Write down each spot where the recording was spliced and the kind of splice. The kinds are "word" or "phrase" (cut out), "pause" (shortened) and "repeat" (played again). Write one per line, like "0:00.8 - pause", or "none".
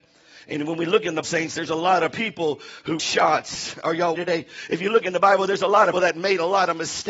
0:01.2 - word
0:03.0 - word
0:04.2 - phrase
0:05.9 - word

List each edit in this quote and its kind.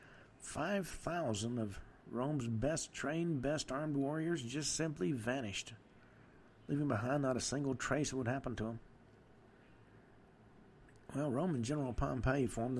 none

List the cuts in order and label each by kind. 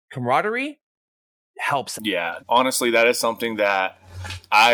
0:02.0 - word
0:02.4 - word

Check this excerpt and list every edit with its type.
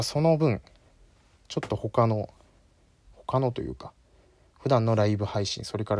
none

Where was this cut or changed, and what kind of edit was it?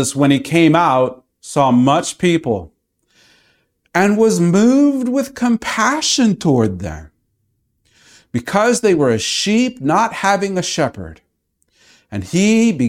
0:01.3 - pause

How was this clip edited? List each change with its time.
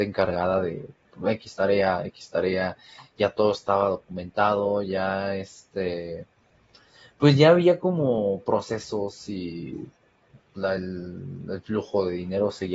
none

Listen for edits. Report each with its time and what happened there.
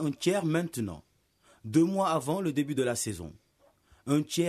none

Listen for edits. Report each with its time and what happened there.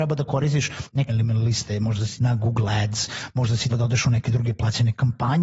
0:01.1 - word
0:02.2 - phrase
0:03.7 - word

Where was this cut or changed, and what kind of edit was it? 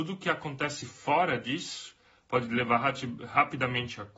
none

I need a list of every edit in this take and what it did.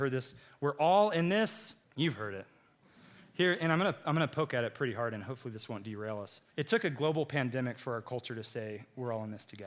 0:01.8 - pause
0:06.5 - pause

